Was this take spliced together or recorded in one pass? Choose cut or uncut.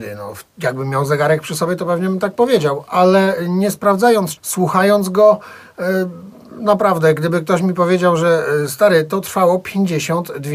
cut